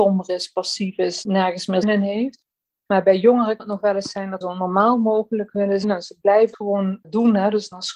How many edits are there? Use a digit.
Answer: 5